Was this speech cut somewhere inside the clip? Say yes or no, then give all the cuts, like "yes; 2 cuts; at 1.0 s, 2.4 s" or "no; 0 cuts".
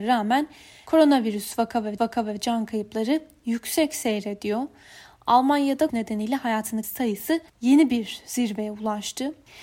yes; 4 cuts; at 2.0 s, 5.9 s, 6.8 s, 7.5 s